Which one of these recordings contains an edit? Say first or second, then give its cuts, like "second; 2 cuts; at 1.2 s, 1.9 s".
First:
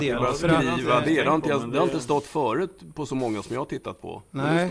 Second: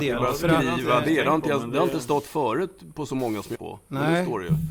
second; 1 cut; at 3.5 s